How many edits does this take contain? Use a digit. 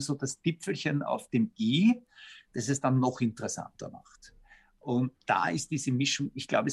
0